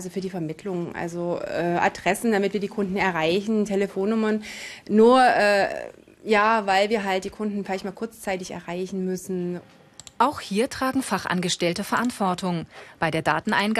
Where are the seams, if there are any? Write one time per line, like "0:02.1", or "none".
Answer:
none